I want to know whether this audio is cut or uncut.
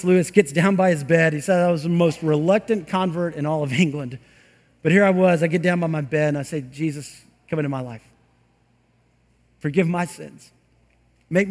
uncut